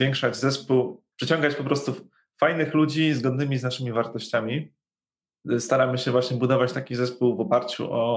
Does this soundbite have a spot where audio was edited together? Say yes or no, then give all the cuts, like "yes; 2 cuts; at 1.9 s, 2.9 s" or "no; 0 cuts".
yes; 1 cut; at 1.1 s